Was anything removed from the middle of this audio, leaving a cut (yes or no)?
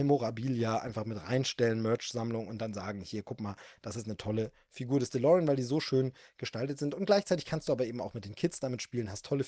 no